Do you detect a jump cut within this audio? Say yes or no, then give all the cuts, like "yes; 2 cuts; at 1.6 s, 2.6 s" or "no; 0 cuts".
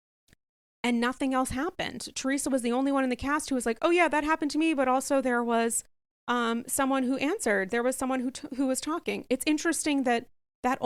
no; 0 cuts